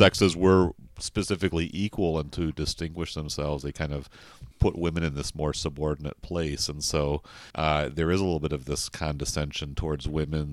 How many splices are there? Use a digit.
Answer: 2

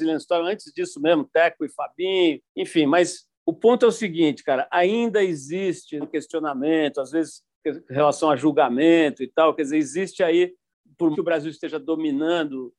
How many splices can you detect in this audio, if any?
4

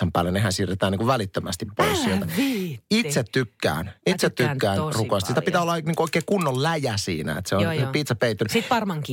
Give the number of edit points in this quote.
0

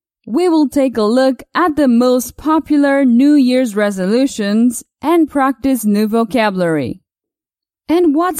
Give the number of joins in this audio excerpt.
0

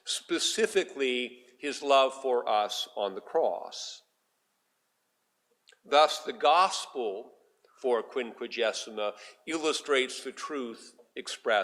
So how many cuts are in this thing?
0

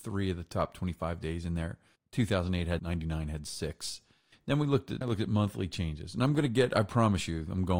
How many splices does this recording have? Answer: 2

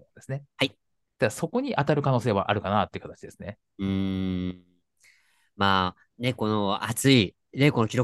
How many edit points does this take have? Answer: 1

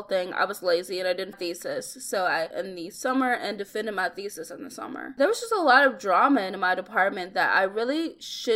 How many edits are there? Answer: 2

